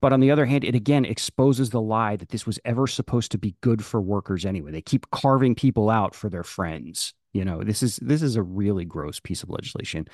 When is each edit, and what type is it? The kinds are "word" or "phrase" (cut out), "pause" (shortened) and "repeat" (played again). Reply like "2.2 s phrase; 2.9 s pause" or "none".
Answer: none